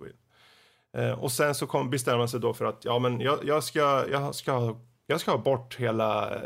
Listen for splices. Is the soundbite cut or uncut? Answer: uncut